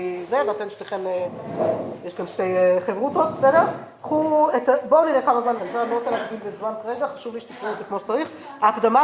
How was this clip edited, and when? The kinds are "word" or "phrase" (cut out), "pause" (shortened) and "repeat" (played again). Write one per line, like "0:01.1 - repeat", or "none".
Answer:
0:05.6 - word